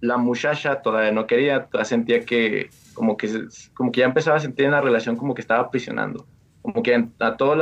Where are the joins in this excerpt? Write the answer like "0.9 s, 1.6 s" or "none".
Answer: none